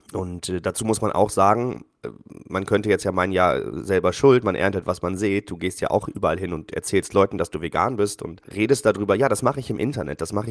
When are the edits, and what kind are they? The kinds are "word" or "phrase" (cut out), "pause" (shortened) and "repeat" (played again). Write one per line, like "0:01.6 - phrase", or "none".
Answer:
none